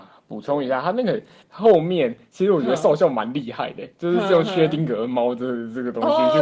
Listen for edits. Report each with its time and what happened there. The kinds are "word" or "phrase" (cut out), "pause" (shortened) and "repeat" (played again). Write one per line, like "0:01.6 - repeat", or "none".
0:01.4 - pause